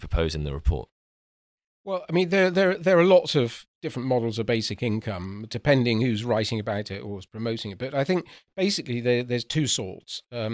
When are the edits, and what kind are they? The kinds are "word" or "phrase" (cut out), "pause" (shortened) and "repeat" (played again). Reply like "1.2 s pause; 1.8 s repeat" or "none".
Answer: none